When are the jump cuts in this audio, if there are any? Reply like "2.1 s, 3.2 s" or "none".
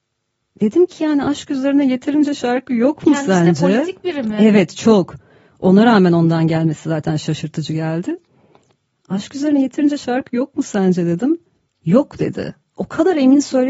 none

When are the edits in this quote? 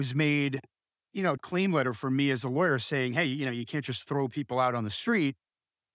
1.4 s

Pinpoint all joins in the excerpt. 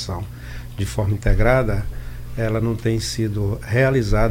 none

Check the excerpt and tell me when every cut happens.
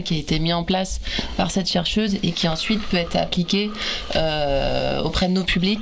none

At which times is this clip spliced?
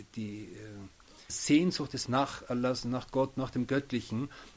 1.3 s, 2.1 s

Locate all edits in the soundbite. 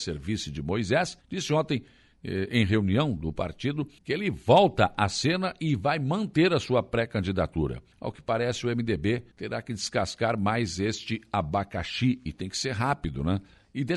1.2 s, 4.0 s, 7.9 s, 9.3 s

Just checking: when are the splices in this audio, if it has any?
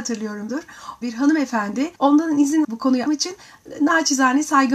1.0 s, 2.0 s, 2.6 s, 3.1 s

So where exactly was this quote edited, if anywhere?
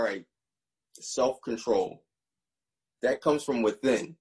none

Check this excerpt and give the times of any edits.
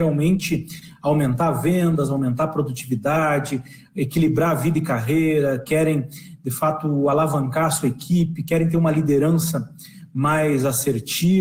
none

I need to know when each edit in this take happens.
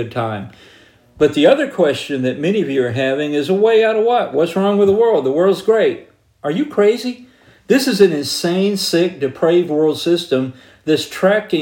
none

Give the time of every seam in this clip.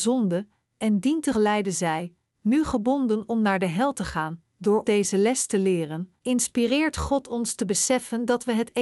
1.3 s, 4.8 s, 6.2 s

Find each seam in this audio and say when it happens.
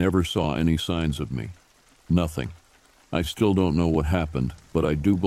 none

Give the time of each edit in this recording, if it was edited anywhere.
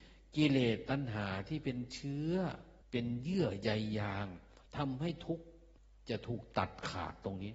2.8 s, 4.7 s, 5.8 s

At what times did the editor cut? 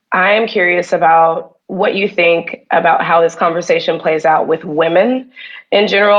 1.6 s

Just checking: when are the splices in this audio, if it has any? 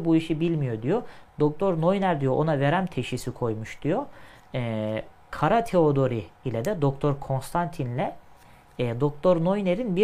none

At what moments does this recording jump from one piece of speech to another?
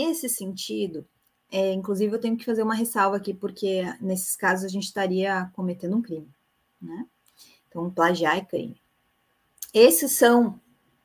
none

